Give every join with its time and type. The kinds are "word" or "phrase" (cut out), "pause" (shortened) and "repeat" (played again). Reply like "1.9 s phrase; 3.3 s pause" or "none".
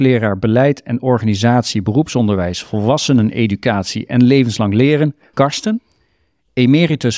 5.3 s word